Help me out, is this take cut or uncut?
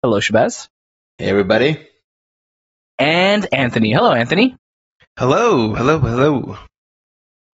uncut